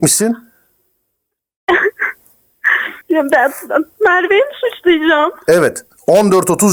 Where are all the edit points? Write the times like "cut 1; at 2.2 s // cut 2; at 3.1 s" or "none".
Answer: cut 1; at 3.0 s